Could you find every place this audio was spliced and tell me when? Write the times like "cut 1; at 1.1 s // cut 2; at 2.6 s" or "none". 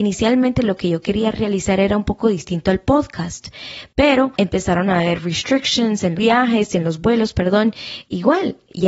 cut 1; at 6.2 s